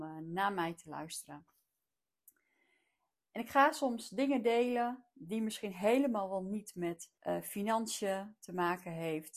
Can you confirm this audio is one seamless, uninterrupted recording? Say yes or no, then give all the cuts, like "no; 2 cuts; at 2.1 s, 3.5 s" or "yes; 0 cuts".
no; 1 cut; at 7.2 s